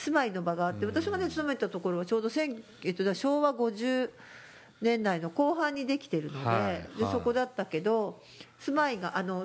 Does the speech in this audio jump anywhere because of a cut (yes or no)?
no